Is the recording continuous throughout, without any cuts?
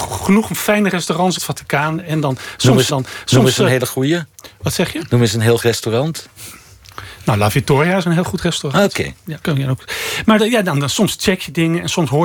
no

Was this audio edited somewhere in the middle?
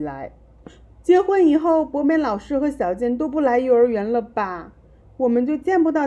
no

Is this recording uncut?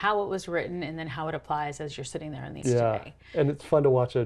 no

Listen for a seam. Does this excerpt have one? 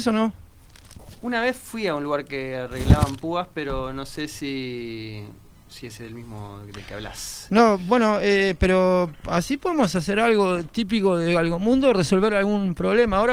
no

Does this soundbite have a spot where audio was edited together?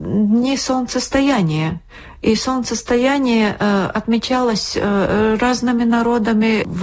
no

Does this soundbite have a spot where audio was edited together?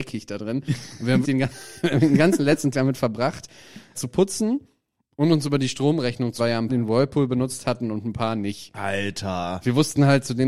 yes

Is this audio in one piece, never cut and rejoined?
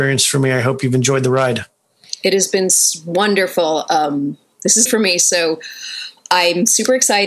no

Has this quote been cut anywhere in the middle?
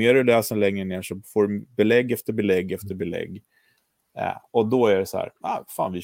no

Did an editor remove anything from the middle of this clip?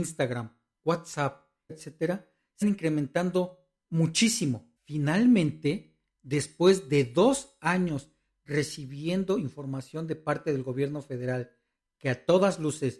yes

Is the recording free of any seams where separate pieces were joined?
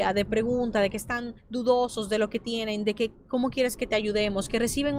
no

